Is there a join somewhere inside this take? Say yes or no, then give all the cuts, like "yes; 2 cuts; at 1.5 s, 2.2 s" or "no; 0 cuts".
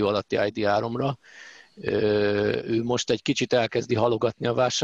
no; 0 cuts